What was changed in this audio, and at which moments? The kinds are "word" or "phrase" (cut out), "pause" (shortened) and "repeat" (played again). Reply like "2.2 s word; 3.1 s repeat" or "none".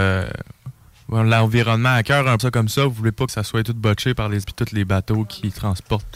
2.4 s phrase; 3.3 s word; 4.4 s word